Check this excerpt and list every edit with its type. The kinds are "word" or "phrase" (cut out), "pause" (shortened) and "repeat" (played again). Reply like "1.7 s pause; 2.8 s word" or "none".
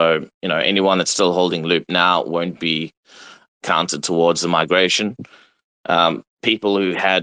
none